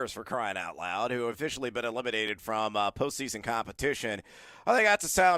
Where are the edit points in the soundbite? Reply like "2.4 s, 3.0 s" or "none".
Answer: none